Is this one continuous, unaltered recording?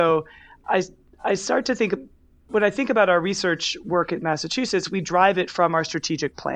yes; 0 cuts

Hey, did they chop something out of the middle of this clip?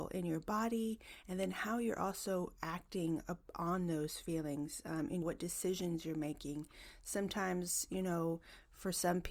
yes; 1 cut; at 5.2 s

